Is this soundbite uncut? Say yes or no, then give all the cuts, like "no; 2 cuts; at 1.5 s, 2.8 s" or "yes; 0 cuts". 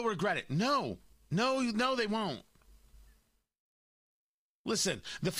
yes; 0 cuts